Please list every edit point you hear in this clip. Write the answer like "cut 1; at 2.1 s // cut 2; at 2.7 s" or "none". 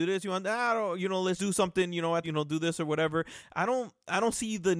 cut 1; at 1.4 s // cut 2; at 2.2 s

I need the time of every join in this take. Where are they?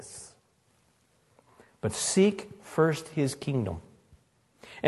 none

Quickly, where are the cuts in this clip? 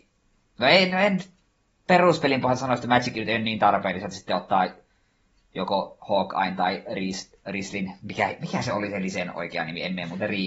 none

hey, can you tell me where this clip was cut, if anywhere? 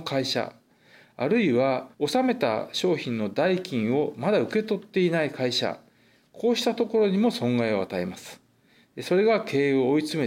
cut 1; at 1.9 s

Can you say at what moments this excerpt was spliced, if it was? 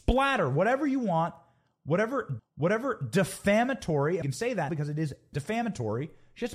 cut 1; at 2.4 s // cut 2; at 4.2 s // cut 3; at 4.7 s // cut 4; at 5.3 s

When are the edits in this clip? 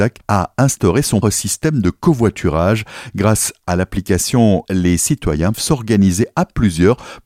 cut 1; at 1.2 s // cut 2; at 4.7 s // cut 3; at 5.5 s

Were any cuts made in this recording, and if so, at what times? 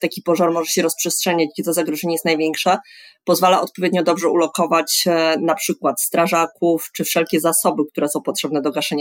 none

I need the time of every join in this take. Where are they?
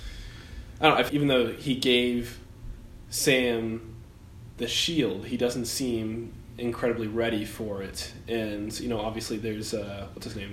cut 1; at 1.1 s

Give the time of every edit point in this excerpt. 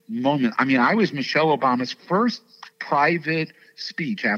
cut 1; at 2.7 s

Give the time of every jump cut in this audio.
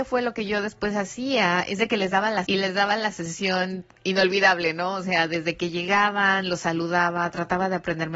cut 1; at 2.4 s

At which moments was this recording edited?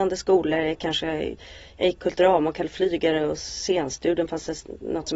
none

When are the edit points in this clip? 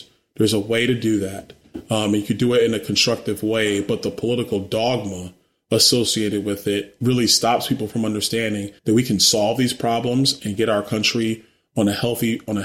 cut 1; at 8.8 s

